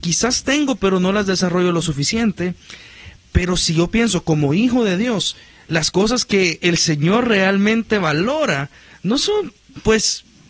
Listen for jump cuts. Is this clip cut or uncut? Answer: uncut